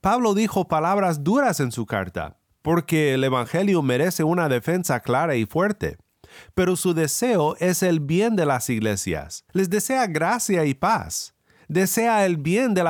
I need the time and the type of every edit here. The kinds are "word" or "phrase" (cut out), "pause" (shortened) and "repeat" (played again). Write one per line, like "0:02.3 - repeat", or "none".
0:09.5 - pause